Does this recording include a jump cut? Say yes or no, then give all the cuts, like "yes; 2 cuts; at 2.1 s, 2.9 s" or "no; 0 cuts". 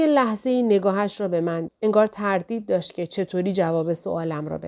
yes; 1 cut; at 1.7 s